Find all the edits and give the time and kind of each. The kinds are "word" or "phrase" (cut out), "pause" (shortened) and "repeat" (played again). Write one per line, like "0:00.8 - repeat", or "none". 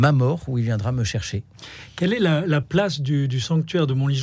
none